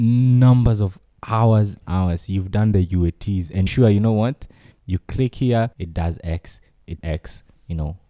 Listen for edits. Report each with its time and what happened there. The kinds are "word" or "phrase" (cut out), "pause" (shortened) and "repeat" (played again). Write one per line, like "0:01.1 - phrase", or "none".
0:01.8 - word
0:03.7 - word
0:04.7 - word
0:05.7 - pause
0:07.0 - word